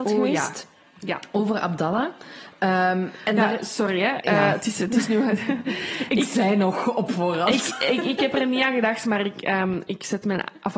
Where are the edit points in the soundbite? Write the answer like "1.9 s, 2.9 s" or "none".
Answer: none